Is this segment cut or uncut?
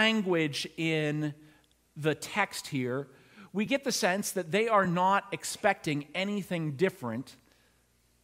uncut